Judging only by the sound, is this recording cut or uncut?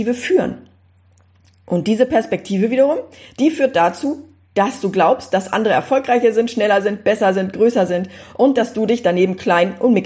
uncut